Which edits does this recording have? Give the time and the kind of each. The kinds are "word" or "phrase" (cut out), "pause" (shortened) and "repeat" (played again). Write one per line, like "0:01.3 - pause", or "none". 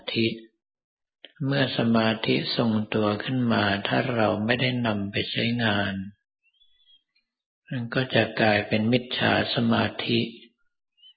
0:01.3 - pause